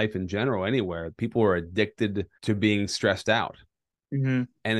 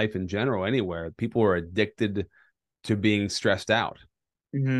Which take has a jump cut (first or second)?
first